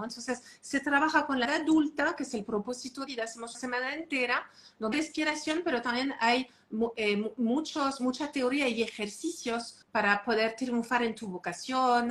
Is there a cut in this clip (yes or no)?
yes